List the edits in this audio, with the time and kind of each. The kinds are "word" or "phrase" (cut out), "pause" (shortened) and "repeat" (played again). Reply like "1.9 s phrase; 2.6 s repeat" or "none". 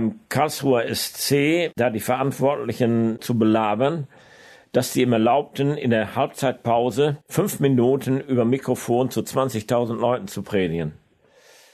3.2 s word; 7.2 s pause